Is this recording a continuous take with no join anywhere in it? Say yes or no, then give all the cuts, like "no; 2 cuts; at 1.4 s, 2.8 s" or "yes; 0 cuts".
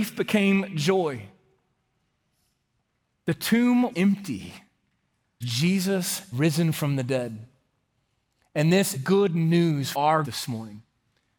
no; 6 cuts; at 3.9 s, 5.4 s, 6.3 s, 8.9 s, 9.9 s, 10.2 s